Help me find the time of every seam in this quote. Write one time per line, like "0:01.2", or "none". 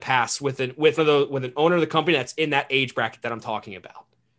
0:01.0